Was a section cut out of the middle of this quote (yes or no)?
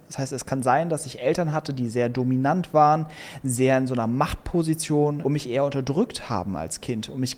yes